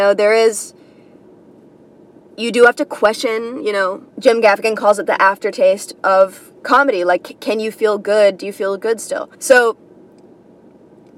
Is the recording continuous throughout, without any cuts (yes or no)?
no